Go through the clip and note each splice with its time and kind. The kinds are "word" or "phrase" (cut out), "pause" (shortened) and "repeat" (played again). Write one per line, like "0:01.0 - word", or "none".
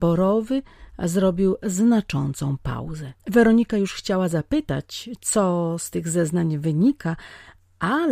0:03.2 - pause